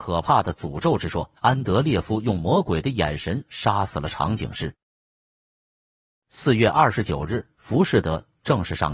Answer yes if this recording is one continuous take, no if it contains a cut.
no